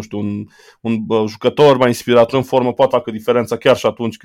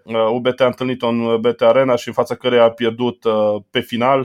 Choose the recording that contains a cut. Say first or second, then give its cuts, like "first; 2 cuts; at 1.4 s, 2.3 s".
first; 2 cuts; at 2.3 s, 2.9 s